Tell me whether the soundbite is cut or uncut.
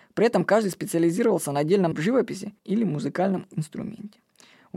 cut